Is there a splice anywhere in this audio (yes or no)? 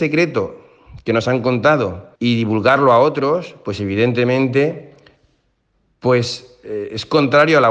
yes